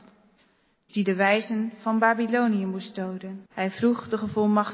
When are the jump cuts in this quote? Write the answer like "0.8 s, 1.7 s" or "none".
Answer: 3.5 s